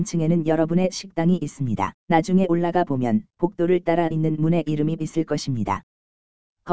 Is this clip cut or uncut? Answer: cut